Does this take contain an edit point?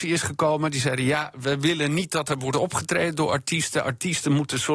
no; 0 cuts

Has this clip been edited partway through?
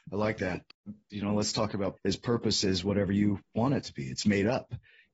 yes; 2 cuts; at 1.1 s, 2.0 s

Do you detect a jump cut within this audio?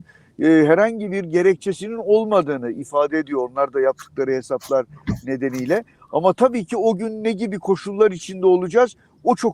no; 0 cuts

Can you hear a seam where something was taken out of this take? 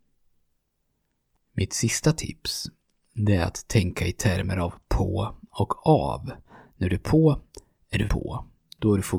yes; 1 cut; at 8.1 s

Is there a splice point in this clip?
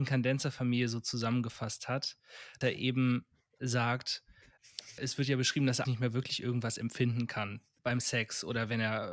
yes; 3 cuts; at 2.6 s, 5.0 s, 5.8 s

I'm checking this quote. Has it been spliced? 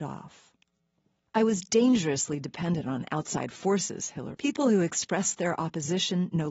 yes; 1 cut; at 4.3 s

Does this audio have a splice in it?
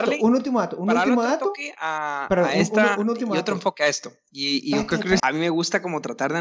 yes; 1 cut; at 5.2 s

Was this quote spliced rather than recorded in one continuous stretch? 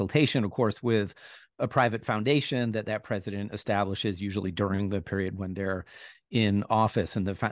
no; 0 cuts

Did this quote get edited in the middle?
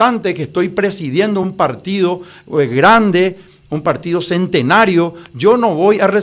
no; 0 cuts

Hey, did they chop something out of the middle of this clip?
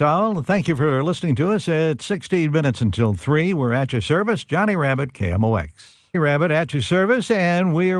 no; 0 cuts

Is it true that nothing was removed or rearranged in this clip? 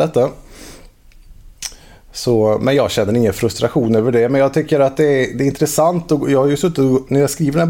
yes; 0 cuts

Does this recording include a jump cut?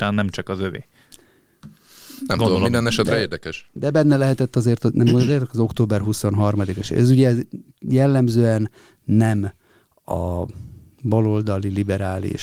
no; 0 cuts

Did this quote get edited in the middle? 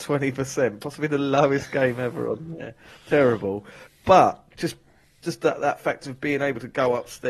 no; 0 cuts

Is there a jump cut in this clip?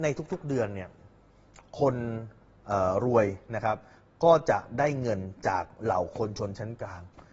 no; 0 cuts

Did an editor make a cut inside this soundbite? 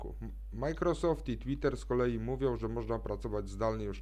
no; 0 cuts

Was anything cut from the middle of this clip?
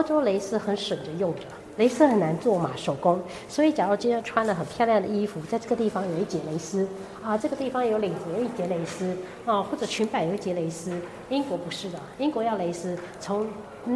no; 0 cuts

